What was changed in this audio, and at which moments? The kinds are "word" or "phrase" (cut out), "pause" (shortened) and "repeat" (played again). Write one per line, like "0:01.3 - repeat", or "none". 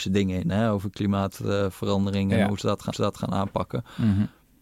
0:02.9 - repeat